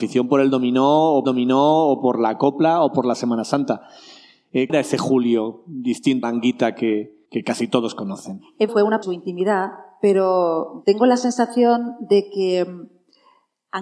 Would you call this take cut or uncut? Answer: cut